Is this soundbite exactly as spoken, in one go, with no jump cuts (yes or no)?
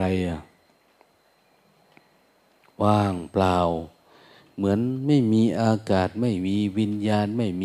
yes